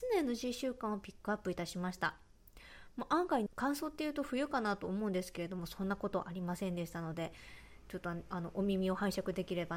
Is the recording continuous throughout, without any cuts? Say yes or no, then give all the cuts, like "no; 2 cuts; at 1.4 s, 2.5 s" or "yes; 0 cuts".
no; 1 cut; at 3.5 s